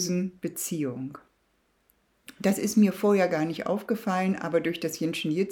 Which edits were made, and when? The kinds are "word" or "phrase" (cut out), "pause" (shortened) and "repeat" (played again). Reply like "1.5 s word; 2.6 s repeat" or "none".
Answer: none